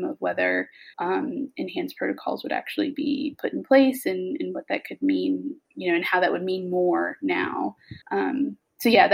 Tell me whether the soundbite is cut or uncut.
cut